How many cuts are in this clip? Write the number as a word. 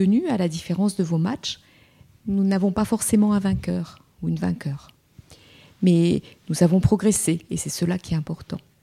zero